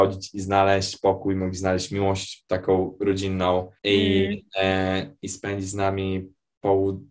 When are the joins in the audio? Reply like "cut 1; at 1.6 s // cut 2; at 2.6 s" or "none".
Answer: cut 1; at 3.8 s